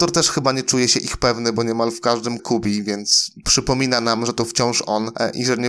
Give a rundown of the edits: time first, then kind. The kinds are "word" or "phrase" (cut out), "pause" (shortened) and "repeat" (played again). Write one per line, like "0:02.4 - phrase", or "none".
0:02.4 - phrase